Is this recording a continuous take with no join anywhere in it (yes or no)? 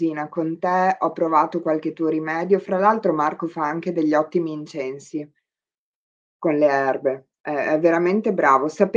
yes